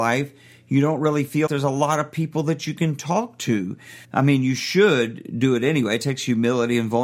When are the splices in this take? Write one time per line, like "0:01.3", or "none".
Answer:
0:01.5
0:04.0